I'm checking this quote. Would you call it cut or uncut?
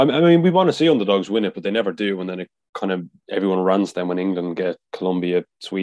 uncut